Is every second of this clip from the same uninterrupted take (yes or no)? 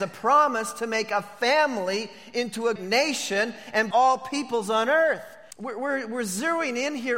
no